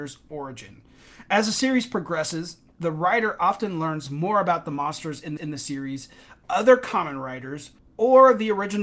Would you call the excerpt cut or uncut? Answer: cut